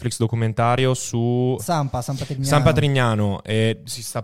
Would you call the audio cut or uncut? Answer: cut